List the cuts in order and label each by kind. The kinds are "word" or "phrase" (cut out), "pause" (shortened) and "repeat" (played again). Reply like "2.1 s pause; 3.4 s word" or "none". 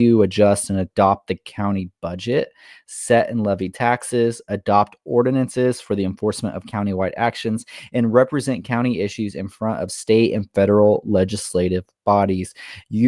none